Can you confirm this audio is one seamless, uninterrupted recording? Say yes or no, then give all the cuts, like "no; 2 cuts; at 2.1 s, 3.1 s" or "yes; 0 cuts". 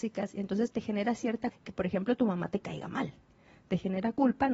no; 1 cut; at 1.5 s